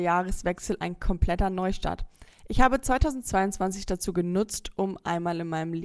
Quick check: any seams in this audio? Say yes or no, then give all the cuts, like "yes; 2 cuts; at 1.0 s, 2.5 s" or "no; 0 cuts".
no; 0 cuts